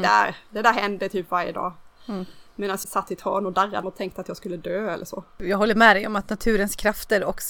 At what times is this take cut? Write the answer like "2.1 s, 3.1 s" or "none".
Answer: 2.8 s, 3.8 s